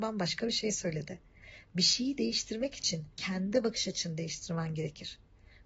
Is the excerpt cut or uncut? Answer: cut